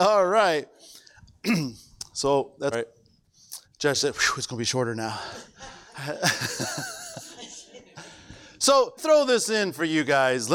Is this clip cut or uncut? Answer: cut